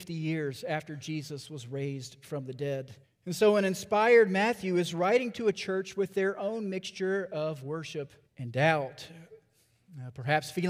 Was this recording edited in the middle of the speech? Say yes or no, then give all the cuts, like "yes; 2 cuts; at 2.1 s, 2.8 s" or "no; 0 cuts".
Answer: yes; 2 cuts; at 3.0 s, 8.2 s